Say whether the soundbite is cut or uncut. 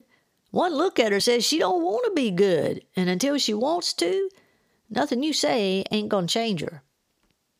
uncut